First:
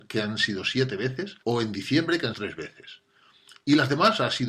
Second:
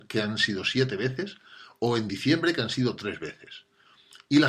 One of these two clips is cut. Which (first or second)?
first